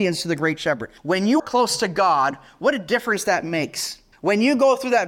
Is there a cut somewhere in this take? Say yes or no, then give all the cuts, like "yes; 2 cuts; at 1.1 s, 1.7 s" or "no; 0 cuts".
yes; 3 cuts; at 1.0 s, 1.4 s, 4.1 s